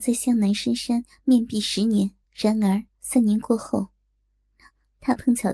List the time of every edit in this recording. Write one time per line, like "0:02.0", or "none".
0:02.2
0:02.9